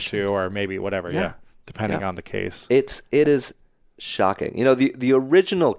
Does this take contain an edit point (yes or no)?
no